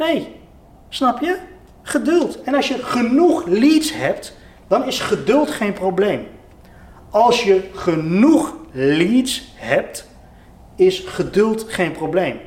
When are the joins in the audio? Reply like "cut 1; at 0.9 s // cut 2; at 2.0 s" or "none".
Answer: none